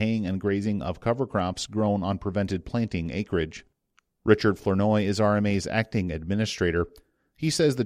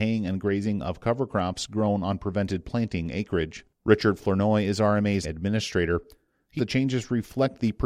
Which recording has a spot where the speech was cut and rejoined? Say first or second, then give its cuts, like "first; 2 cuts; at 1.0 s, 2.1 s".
second; 3 cuts; at 3.7 s, 5.2 s, 6.6 s